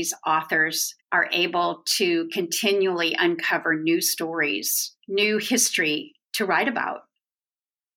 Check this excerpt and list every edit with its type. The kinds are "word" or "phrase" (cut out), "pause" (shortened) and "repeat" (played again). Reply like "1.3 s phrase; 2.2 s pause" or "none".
1.0 s pause; 5.0 s pause; 6.2 s pause